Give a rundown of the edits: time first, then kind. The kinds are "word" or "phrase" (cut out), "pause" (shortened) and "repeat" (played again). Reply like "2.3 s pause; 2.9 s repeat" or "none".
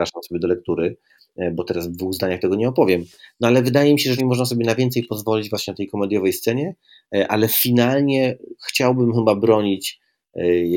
4.2 s word; 8.6 s pause

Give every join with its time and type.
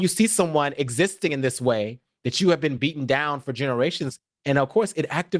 none

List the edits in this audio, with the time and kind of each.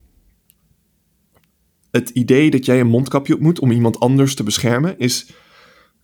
none

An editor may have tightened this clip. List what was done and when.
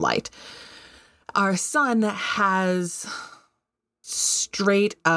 1.3 s word; 4.0 s word

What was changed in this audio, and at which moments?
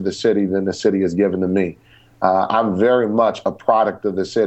none

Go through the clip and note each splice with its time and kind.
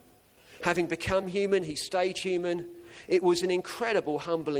none

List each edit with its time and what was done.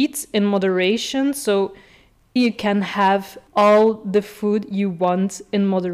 2.4 s word; 3.5 s pause

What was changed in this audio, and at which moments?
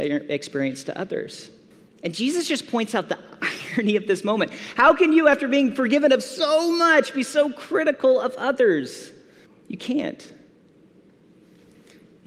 1.7 s pause; 9.5 s pause

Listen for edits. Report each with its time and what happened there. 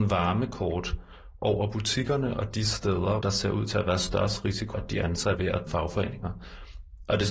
3.2 s word; 4.7 s word; 5.3 s word; 5.7 s word

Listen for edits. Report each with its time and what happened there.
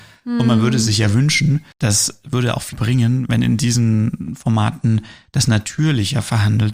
1.7 s pause; 2.7 s word

